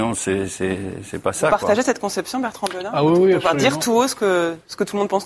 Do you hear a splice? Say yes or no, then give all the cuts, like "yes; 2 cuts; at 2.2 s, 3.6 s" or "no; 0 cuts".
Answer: no; 0 cuts